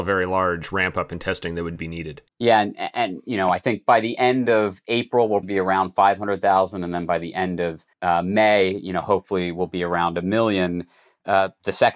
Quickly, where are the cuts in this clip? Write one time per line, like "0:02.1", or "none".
0:02.3
0:05.4
0:07.9

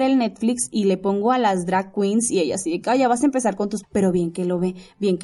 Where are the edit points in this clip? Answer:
0:03.8

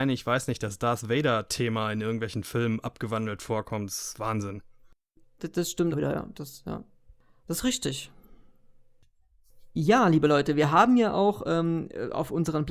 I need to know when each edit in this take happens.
0:05.9

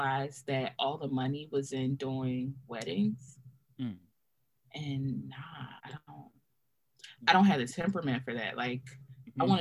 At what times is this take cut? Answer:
0:04.4
0:05.8

